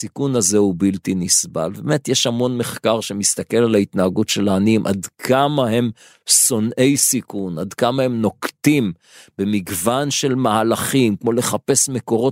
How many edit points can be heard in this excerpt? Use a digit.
0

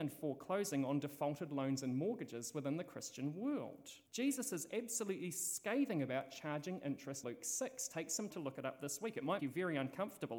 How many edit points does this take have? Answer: 4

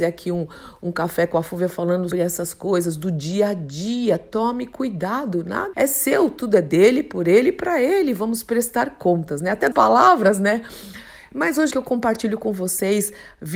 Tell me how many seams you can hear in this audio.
4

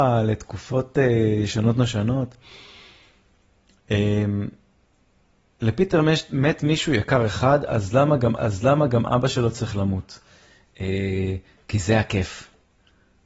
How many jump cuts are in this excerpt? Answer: 1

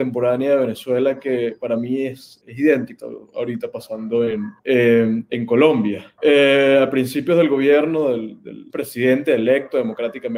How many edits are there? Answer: 5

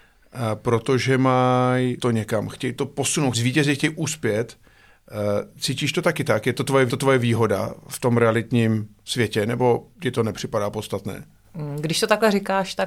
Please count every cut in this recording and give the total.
4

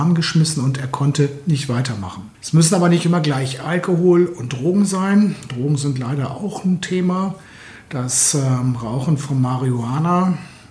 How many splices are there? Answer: 1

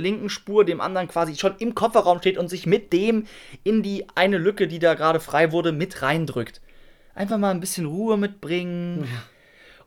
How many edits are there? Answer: 0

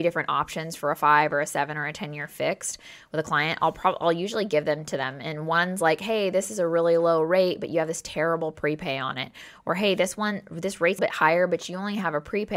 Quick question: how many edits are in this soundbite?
1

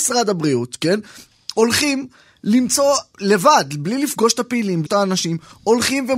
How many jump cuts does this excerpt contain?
1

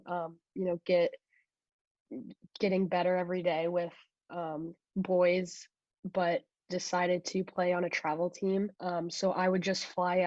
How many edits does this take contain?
1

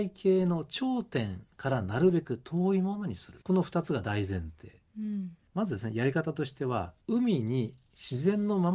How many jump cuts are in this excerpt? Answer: 2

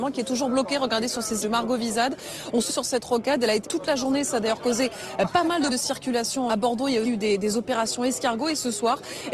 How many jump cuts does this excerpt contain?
6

